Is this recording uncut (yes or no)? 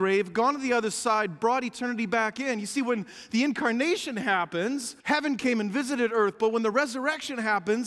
no